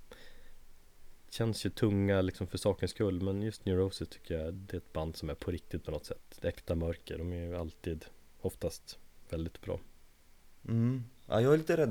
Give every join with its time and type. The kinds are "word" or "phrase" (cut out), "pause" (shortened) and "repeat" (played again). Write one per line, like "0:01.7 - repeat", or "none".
0:04.5 - word
0:09.6 - word